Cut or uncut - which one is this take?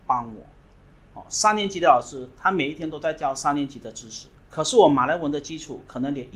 cut